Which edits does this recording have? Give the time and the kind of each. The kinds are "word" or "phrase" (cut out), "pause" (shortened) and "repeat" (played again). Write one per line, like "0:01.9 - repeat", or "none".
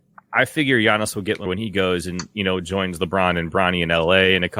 0:01.5 - word